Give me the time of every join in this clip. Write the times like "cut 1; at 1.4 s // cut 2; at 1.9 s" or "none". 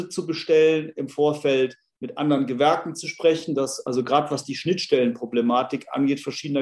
none